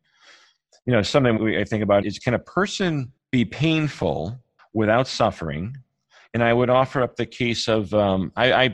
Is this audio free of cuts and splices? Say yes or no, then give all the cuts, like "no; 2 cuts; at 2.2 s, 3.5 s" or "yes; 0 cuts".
no; 4 cuts; at 1.4 s, 2.0 s, 3.2 s, 4.6 s